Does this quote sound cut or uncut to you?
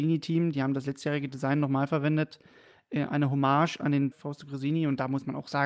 cut